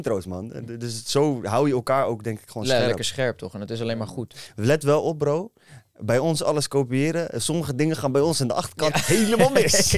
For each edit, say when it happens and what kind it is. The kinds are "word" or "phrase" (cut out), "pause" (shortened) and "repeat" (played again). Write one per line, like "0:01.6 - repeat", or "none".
none